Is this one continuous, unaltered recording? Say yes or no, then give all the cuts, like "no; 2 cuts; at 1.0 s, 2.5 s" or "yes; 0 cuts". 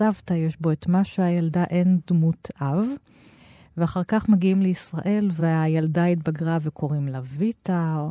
yes; 0 cuts